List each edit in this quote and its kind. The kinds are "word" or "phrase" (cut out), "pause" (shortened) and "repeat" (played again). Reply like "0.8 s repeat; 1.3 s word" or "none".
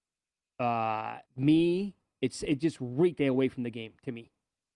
1.3 s pause; 3.2 s phrase